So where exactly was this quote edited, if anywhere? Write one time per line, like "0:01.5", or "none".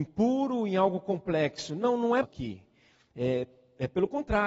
0:02.2